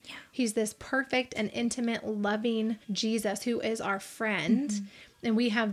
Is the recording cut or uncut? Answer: cut